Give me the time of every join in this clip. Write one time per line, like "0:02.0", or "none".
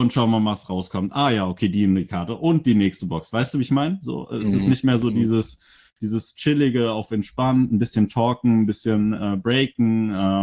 none

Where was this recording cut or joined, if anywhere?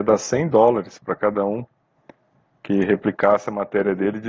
none

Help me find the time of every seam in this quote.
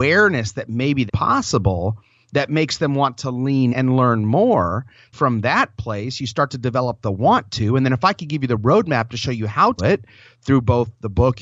0:01.1
0:03.7
0:05.1
0:09.8

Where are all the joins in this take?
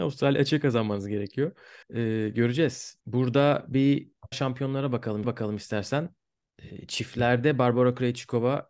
0:01.8
0:03.0
0:04.3
0:05.2

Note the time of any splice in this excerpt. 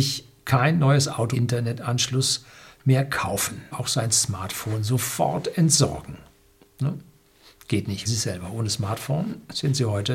0:01.3
0:03.7
0:08.0

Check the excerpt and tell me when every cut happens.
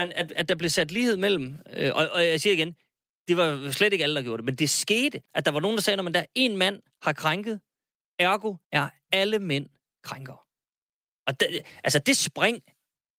0:05.3
0:08.6

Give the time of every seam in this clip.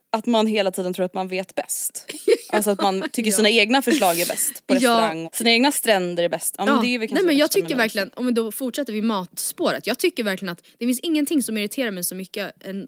0:05.2

